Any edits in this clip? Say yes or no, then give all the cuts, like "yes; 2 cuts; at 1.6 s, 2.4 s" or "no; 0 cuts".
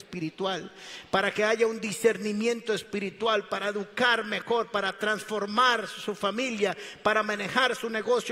no; 0 cuts